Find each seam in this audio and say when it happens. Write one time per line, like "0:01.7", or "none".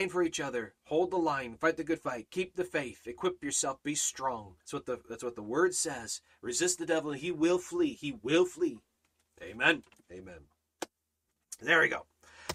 0:04.6
0:09.9